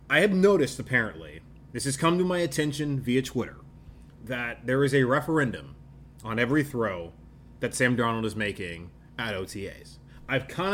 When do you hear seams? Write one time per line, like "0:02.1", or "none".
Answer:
none